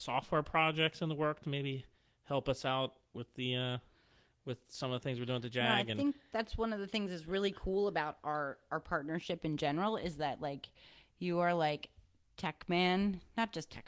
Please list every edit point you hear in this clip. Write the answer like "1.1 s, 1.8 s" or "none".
none